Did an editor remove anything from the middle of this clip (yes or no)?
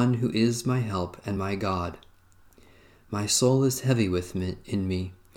no